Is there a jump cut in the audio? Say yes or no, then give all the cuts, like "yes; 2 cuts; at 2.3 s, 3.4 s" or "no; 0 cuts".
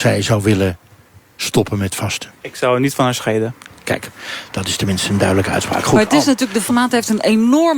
yes; 2 cuts; at 2.4 s, 6.7 s